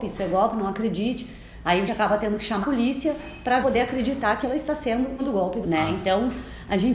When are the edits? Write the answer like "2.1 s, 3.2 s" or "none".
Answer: 1.9 s, 2.6 s, 3.6 s, 4.4 s, 5.2 s, 5.6 s

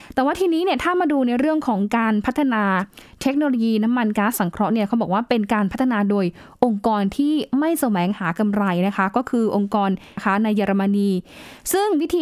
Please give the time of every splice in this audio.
10.2 s

